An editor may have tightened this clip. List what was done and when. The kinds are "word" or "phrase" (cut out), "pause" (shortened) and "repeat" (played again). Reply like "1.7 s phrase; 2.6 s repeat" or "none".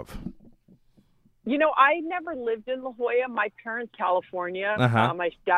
3.9 s phrase

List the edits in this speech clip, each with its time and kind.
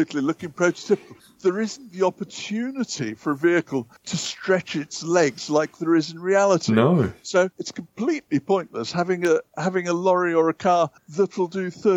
4.0 s pause; 7.5 s pause; 11.0 s pause

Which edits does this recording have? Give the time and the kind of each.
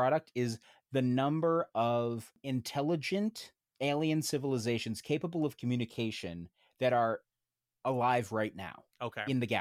none

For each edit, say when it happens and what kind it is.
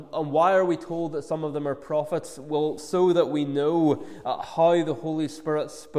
2.8 s word

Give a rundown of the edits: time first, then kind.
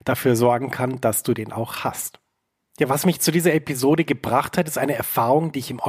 none

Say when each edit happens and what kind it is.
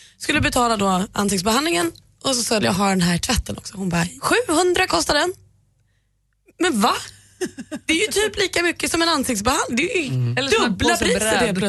2.6 s phrase; 4.2 s word; 4.9 s word

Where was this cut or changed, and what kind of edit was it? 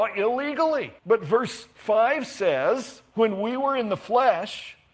1.0 s pause

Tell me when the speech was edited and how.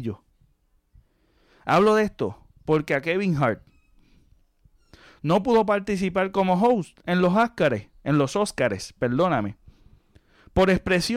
none

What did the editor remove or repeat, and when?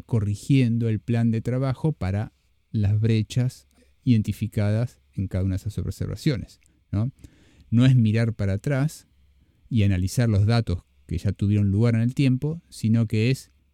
none

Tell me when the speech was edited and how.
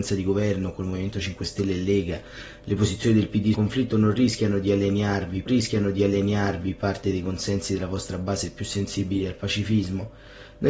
3.5 s word; 5.5 s repeat

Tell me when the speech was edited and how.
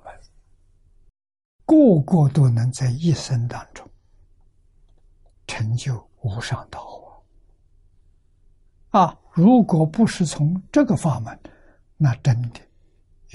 6.2 s pause; 8.4 s pause

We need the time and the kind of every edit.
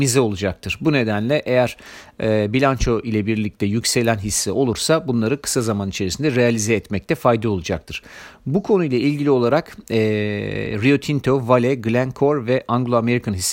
none

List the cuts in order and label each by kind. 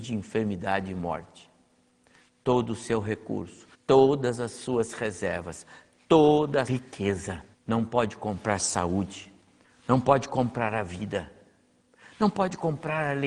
3.7 s pause; 6.7 s word; 7.5 s pause

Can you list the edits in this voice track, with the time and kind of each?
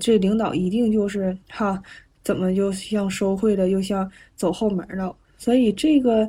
1.4 s pause; 5.2 s pause

